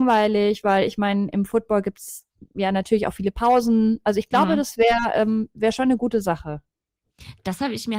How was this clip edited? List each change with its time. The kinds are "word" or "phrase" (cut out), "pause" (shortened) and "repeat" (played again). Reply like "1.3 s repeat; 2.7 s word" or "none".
none